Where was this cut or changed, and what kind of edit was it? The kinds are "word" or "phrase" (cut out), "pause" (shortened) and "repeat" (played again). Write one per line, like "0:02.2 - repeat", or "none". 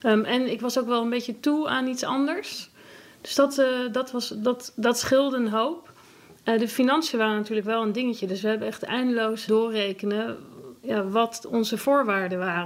0:09.5 - word

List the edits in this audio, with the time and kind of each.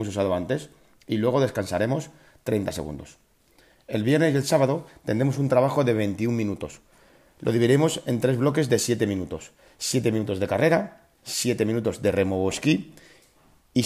0:11.2 - pause

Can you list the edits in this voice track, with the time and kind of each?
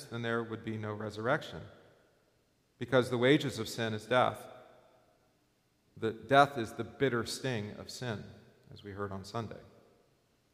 none

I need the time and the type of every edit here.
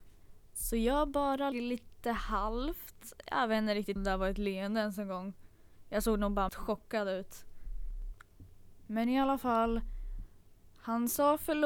0:01.5 - word
0:04.0 - word
0:06.5 - word

